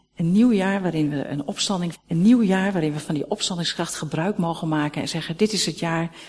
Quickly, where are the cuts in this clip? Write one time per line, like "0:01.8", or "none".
0:01.9